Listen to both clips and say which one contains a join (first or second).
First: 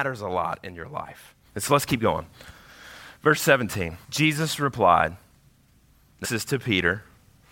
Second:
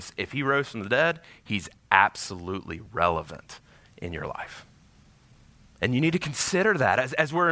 first